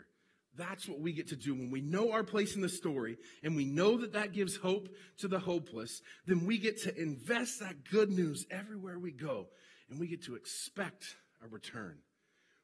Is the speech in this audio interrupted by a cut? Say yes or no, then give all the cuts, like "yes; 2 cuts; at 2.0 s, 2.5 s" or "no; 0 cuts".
no; 0 cuts